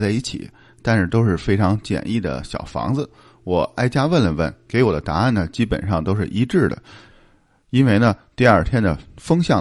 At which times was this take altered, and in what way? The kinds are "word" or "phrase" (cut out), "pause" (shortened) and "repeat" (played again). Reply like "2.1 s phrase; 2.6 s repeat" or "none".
none